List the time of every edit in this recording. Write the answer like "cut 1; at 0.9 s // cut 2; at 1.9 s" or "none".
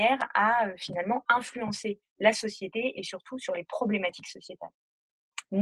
none